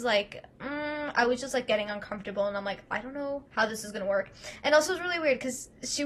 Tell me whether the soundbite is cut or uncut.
cut